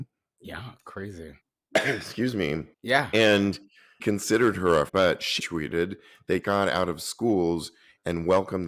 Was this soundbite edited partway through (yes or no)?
yes